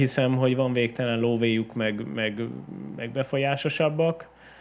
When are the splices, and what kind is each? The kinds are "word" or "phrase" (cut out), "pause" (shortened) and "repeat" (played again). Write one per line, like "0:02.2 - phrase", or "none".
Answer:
none